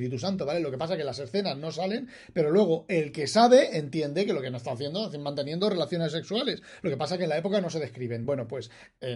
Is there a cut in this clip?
no; 0 cuts

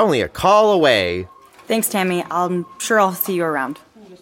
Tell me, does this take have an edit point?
no; 0 cuts

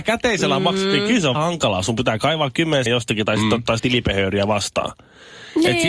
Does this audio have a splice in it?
yes; 3 cuts; at 1.3 s, 2.9 s, 3.8 s

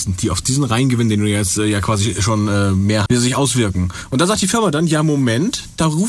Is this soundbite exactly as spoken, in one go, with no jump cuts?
no; 1 cut; at 3.1 s

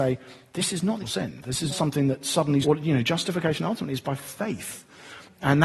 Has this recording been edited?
yes; 3 cuts; at 1.0 s, 1.7 s, 2.6 s

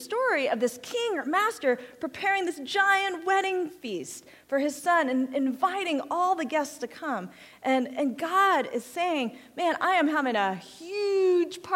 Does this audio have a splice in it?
no; 0 cuts

